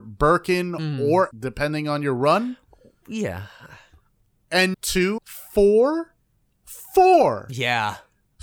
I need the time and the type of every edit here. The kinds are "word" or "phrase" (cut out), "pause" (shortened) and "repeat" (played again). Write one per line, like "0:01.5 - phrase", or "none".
0:01.3 - word
0:04.7 - word
0:05.2 - word